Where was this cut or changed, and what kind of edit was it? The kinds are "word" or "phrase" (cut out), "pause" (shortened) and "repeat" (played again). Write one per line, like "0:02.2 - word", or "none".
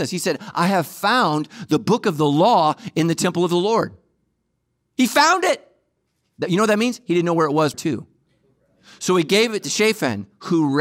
0:07.7 - word